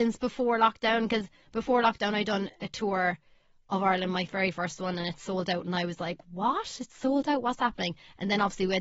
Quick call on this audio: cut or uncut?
uncut